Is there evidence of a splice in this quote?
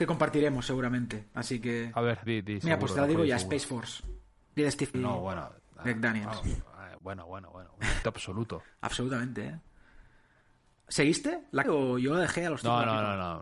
yes; 6 cuts; at 2.3 s, 4.6 s, 4.9 s, 7.0 s, 8.0 s, 11.6 s

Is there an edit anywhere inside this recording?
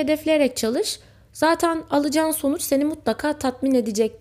no; 0 cuts

